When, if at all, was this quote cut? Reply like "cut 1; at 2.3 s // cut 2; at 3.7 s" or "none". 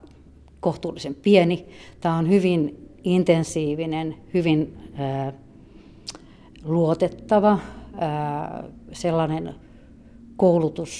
none